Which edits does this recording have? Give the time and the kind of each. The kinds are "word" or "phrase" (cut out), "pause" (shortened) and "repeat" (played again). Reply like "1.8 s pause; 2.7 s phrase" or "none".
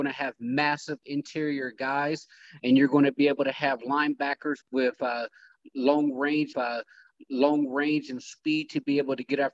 4.6 s word; 6.5 s repeat

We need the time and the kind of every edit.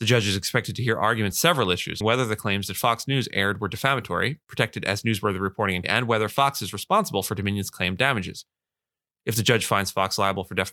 1.3 s word; 2.0 s word; 5.8 s word

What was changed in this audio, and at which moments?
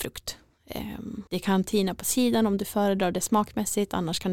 1.3 s pause

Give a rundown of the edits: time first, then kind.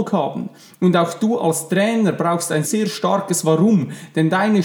2.6 s word

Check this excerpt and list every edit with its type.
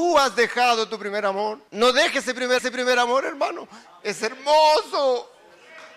1.7 s pause; 2.6 s repeat

